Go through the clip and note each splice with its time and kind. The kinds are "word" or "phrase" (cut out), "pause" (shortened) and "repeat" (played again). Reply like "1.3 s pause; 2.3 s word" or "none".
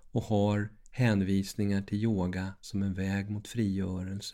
none